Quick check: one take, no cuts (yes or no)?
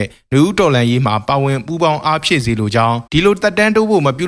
no